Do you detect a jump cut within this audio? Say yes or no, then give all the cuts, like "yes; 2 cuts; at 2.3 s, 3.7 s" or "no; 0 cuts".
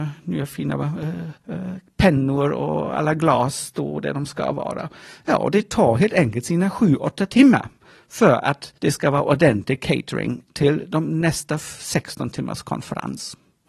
yes; 2 cuts; at 1.4 s, 8.8 s